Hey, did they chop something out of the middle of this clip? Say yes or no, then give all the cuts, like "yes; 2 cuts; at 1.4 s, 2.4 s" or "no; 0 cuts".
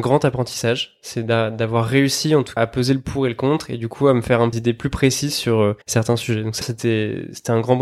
yes; 4 cuts; at 2.6 s, 4.5 s, 5.8 s, 6.6 s